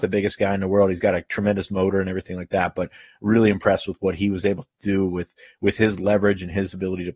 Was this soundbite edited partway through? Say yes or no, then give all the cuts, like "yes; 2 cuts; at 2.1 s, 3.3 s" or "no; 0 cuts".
no; 0 cuts